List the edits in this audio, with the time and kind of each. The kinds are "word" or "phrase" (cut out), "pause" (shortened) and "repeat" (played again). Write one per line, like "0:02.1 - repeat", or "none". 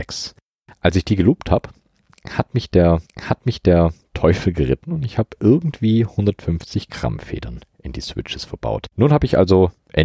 0:03.1 - repeat
0:08.9 - pause